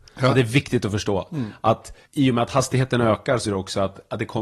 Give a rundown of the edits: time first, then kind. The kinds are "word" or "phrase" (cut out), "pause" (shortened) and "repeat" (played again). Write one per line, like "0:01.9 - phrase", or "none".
0:02.1 - pause
0:03.5 - word